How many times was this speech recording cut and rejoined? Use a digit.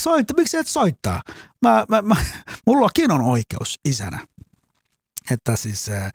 0